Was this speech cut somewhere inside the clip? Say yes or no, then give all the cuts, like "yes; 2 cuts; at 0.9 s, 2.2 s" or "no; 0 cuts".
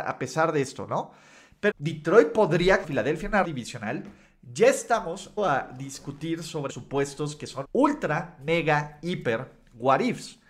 yes; 6 cuts; at 1.7 s, 2.8 s, 3.4 s, 5.4 s, 6.7 s, 7.6 s